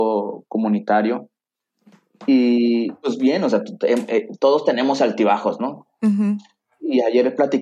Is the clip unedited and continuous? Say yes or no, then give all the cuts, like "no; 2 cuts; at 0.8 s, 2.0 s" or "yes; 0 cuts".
yes; 0 cuts